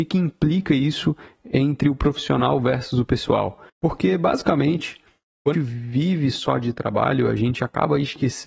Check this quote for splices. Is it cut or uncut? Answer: cut